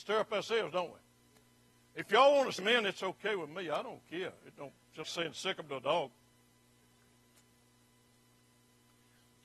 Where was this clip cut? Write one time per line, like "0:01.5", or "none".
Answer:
0:02.6
0:05.0